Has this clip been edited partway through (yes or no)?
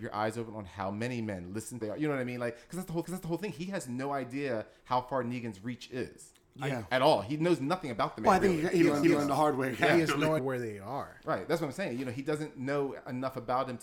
yes